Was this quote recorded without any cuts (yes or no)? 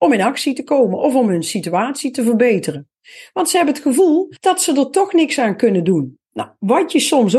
no